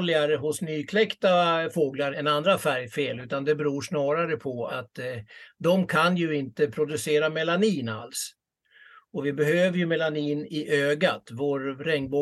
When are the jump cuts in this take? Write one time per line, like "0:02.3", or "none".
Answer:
0:02.1
0:04.7
0:10.5